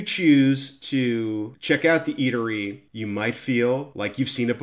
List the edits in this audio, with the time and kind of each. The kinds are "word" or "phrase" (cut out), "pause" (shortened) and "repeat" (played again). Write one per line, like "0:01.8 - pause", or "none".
0:02.9 - pause